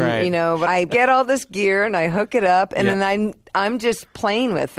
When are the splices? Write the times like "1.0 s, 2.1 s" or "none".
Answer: none